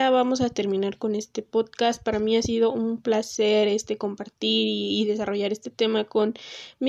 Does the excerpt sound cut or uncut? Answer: uncut